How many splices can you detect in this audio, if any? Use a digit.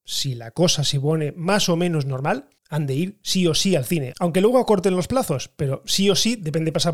1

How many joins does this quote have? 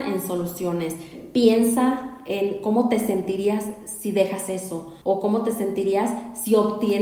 1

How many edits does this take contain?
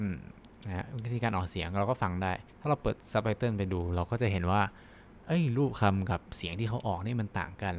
1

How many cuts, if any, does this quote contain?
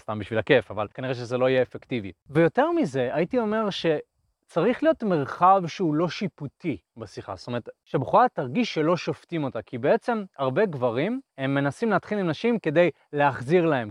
2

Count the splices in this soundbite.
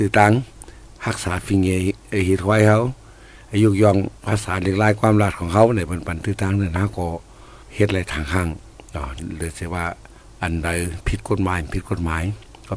3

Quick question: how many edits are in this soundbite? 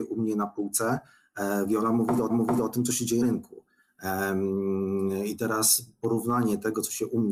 2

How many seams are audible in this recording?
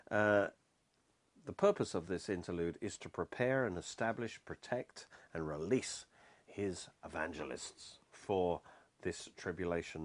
0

